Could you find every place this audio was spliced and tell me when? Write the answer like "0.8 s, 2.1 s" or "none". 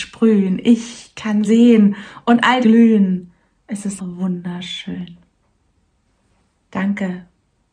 1.4 s, 2.6 s, 4.0 s